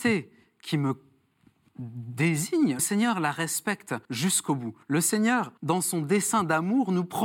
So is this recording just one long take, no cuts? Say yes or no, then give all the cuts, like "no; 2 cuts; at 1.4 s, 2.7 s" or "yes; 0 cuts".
no; 4 cuts; at 2.8 s, 4.0 s, 4.8 s, 5.6 s